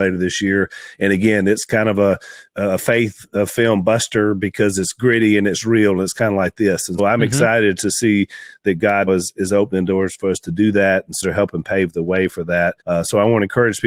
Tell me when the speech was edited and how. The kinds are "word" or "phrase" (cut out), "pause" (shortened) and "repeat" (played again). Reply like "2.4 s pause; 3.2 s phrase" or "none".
7.0 s word; 9.1 s word; 11.2 s phrase; 12.8 s pause